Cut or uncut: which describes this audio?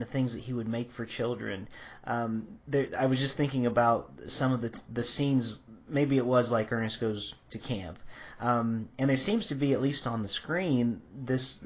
uncut